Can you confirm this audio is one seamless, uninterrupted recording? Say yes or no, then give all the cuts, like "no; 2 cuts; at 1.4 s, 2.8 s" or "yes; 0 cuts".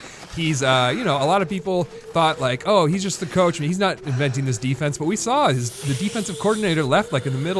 yes; 0 cuts